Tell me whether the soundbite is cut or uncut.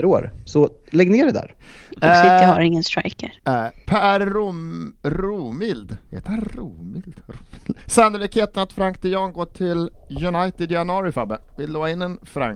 cut